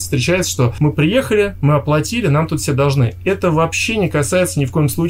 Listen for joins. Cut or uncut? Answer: uncut